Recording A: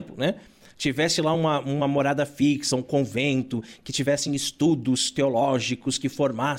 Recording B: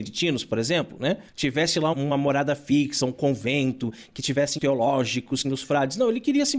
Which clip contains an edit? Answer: B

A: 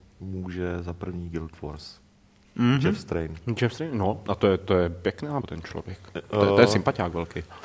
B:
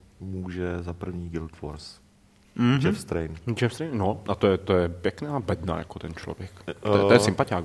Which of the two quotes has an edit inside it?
A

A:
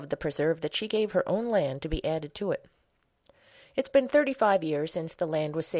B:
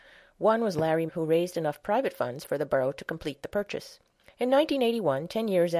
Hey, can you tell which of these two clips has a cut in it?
B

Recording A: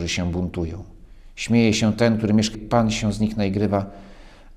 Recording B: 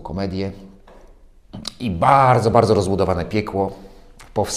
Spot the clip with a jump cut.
A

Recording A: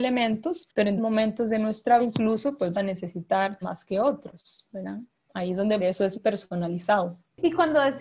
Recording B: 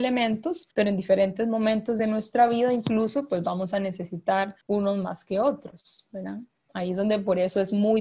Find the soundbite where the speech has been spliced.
A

